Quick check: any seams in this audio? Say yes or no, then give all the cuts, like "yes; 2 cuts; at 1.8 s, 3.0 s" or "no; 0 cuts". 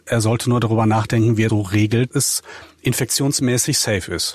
yes; 2 cuts; at 1.5 s, 2.1 s